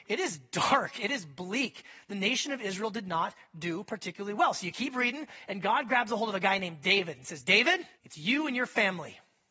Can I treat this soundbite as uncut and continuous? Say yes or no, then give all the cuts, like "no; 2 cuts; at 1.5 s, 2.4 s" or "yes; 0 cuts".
no; 1 cut; at 7.9 s